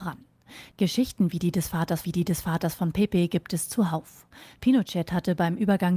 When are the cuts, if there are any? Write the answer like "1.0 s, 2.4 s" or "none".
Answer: 2.0 s